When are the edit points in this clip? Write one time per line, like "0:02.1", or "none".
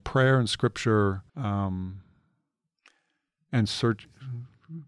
0:01.3

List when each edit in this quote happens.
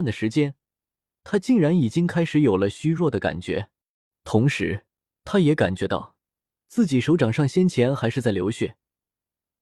none

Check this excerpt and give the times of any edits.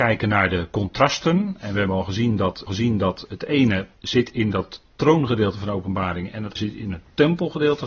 0:02.7
0:03.9
0:06.6

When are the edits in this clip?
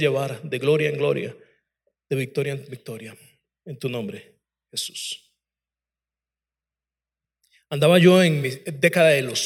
none

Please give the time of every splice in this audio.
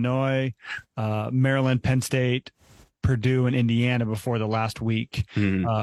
none

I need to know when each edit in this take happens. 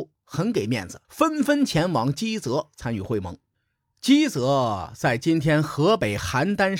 0:01.0
0:03.5

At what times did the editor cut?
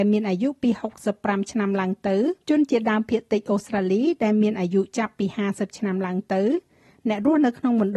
0:02.4

